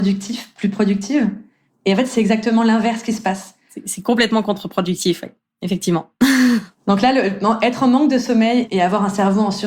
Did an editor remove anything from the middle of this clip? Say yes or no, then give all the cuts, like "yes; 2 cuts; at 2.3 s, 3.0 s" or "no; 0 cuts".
no; 0 cuts